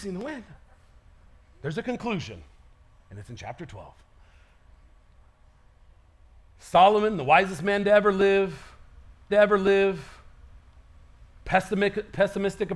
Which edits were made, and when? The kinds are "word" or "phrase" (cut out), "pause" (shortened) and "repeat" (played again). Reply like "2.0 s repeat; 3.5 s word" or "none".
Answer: 9.3 s repeat